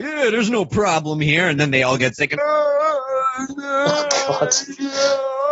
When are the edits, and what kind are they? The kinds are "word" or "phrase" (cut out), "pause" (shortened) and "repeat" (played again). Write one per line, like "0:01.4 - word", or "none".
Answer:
0:02.4 - word